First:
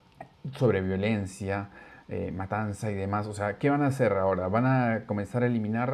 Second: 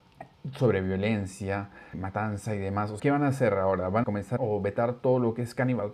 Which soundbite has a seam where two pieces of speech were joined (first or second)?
second